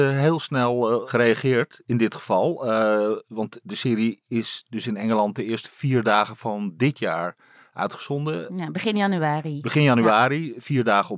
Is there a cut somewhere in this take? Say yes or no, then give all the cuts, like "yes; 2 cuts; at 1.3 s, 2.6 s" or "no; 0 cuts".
no; 0 cuts